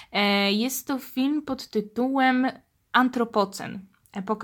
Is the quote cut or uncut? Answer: uncut